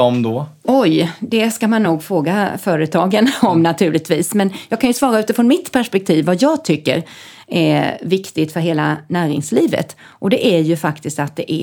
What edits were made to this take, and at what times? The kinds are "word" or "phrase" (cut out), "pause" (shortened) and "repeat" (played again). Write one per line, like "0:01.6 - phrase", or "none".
none